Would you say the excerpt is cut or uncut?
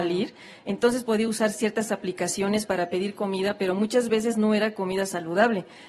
uncut